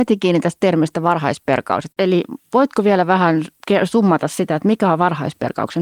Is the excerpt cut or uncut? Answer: uncut